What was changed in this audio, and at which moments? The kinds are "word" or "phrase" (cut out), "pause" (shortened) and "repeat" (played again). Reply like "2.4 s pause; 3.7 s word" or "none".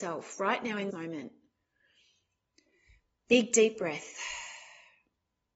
0.9 s word